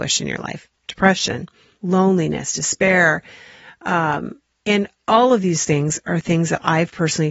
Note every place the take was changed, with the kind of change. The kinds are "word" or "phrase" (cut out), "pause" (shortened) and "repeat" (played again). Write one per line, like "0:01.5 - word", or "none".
0:01.8 - word